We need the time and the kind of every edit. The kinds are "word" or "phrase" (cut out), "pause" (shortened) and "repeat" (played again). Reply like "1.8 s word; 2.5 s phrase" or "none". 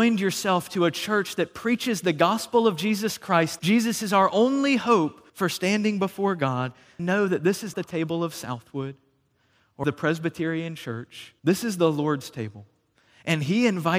3.6 s word; 5.3 s pause; 7.0 s word; 7.7 s word; 9.8 s word; 11.4 s pause